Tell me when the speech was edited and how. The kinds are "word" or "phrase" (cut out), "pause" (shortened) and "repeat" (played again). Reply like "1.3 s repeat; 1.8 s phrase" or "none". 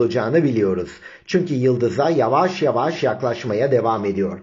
none